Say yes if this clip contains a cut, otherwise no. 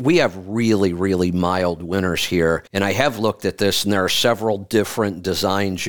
yes